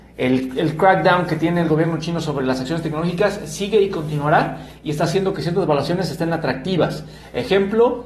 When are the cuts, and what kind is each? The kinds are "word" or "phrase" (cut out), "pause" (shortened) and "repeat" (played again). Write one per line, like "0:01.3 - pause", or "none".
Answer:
none